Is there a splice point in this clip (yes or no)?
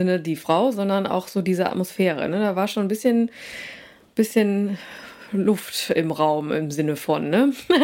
no